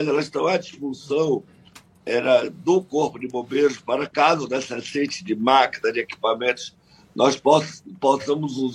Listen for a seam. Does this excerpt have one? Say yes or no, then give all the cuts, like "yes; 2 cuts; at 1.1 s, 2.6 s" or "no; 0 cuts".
no; 0 cuts